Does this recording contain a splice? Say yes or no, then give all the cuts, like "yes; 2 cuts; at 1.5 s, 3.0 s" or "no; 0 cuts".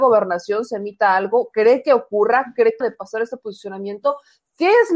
yes; 1 cut; at 2.8 s